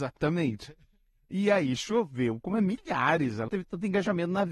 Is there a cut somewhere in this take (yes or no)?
yes